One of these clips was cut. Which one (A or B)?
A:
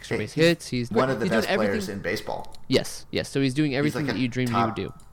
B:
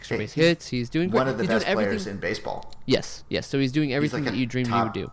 A